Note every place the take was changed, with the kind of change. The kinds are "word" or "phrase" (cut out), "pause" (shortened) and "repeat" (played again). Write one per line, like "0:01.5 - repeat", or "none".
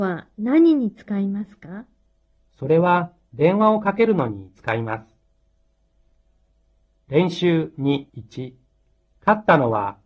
0:08.1 - pause